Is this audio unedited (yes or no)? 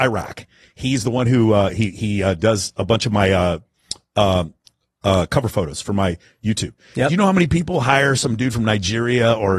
yes